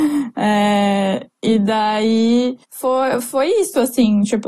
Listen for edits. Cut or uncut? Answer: cut